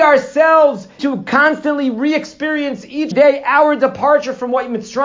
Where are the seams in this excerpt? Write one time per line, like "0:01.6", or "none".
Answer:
0:01.0
0:03.1